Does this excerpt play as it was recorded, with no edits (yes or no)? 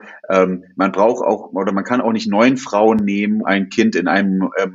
no